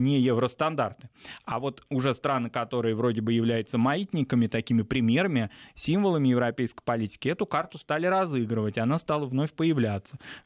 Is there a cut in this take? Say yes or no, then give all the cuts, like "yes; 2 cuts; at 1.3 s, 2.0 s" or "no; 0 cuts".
no; 0 cuts